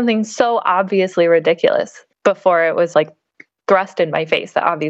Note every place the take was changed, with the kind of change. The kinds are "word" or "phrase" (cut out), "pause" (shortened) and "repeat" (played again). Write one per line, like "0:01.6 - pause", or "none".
0:02.1 - pause
0:02.9 - word